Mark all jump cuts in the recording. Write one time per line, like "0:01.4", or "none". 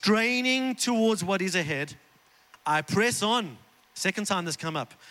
none